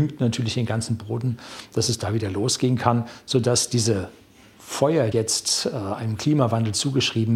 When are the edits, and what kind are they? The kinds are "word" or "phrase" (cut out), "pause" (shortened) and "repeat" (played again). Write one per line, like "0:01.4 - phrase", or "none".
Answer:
0:05.1 - phrase